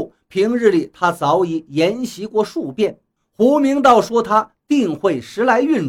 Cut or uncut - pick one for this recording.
cut